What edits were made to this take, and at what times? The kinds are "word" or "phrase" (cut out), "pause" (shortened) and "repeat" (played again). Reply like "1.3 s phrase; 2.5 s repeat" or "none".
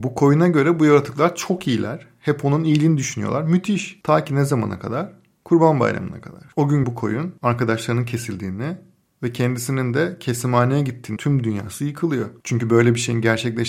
6.8 s word; 11.2 s word